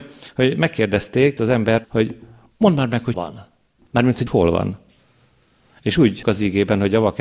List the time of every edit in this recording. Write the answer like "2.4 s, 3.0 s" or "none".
1.4 s, 1.8 s, 3.1 s, 4.3 s, 6.2 s